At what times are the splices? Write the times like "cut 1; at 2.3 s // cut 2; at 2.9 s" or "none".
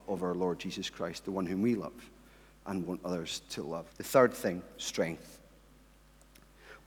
cut 1; at 3.9 s